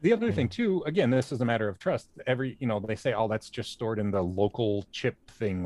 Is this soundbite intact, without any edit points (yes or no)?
yes